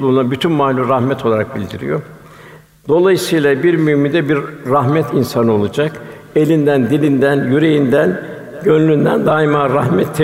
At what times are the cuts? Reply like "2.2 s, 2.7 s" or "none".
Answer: none